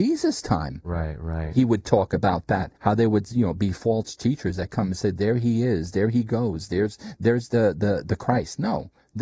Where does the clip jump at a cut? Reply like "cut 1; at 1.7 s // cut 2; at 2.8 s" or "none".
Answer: cut 1; at 2.8 s